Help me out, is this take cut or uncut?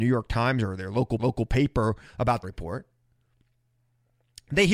cut